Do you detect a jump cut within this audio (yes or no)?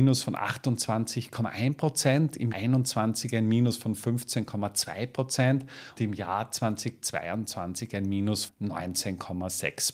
yes